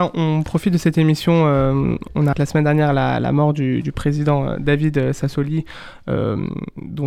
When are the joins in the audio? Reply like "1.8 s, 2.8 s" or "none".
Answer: 2.3 s

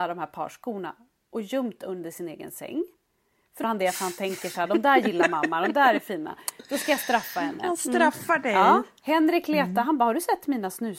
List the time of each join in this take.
3.6 s

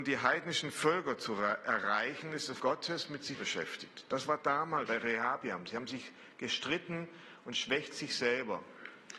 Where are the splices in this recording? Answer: 2.6 s, 3.3 s, 4.9 s

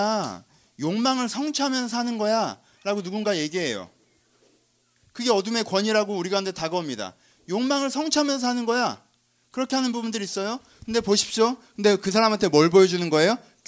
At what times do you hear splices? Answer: none

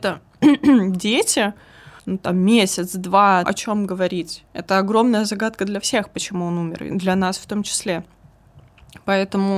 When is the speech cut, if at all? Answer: 2.0 s, 3.4 s, 4.5 s

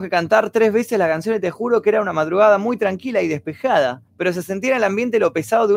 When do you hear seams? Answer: 4.1 s

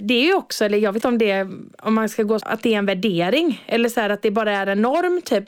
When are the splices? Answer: 1.0 s, 2.4 s

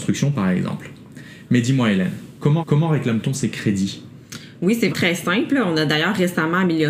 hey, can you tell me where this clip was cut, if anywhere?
2.6 s, 4.9 s

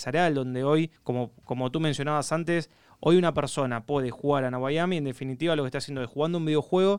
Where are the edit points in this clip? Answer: 1.0 s

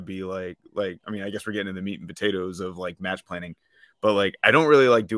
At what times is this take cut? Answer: none

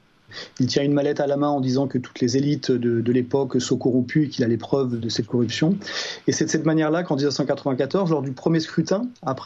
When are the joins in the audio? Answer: none

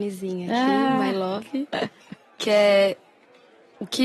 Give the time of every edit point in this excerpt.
none

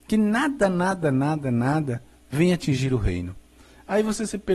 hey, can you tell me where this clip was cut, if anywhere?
none

